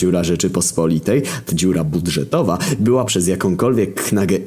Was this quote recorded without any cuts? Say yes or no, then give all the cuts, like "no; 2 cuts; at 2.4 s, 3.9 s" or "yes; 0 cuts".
no; 2 cuts; at 1.5 s, 3.1 s